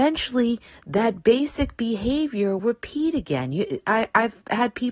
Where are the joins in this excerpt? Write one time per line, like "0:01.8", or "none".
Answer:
0:02.6